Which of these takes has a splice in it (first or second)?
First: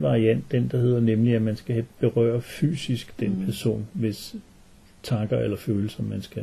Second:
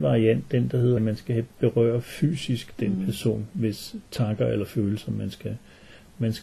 second